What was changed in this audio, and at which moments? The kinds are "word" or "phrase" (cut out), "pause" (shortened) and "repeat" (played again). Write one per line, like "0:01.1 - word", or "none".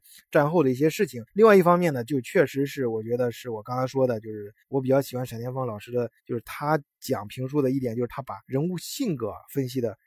0:01.3 - pause
0:04.6 - pause
0:06.2 - pause
0:08.4 - pause